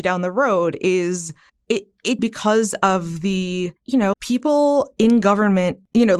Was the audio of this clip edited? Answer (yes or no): yes